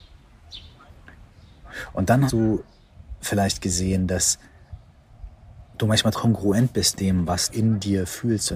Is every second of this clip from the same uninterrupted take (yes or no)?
no